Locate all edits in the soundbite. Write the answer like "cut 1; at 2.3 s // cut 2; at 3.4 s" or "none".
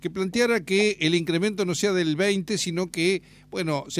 none